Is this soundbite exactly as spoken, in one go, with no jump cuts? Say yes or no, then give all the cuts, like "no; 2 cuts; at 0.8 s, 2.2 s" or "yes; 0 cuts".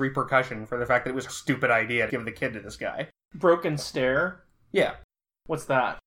no; 2 cuts; at 1.3 s, 2.1 s